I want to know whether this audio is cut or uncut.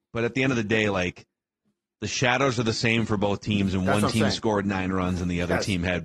uncut